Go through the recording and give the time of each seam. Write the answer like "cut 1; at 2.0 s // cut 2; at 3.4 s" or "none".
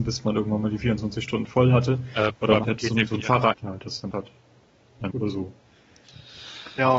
cut 1; at 2.6 s // cut 2; at 3.5 s // cut 3; at 4.1 s // cut 4; at 5.1 s

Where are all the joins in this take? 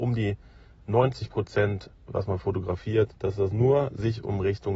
cut 1; at 3.2 s

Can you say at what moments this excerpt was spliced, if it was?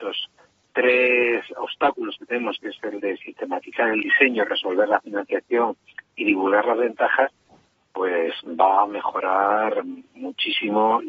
none

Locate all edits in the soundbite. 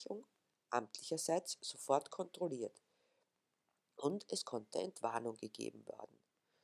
none

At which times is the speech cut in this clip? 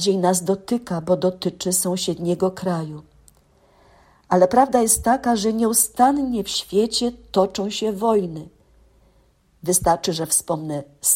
none

